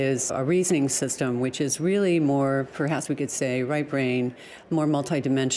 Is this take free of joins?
yes; 0 cuts

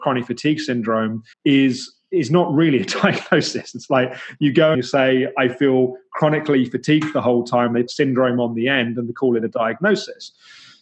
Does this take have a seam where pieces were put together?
yes; 3 cuts; at 1.3 s, 4.7 s, 7.9 s

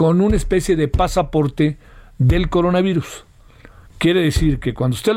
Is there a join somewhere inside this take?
no; 0 cuts

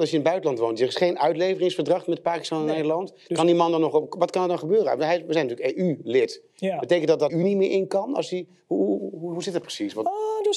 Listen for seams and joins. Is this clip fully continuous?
no; 1 cut; at 7.3 s

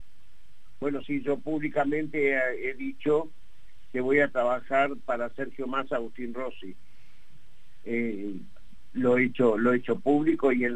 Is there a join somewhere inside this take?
yes; 1 cut; at 1.0 s

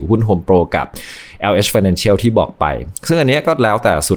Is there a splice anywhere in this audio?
no; 0 cuts

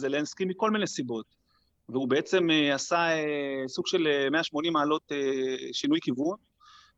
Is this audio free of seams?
yes; 0 cuts

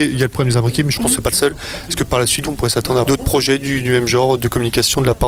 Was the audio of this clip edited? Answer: yes; 1 cut; at 3.0 s

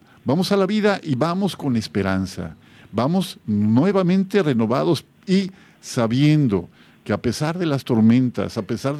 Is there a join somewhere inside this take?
no; 0 cuts

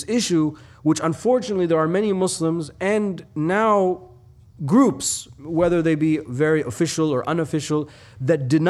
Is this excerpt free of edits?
yes; 0 cuts

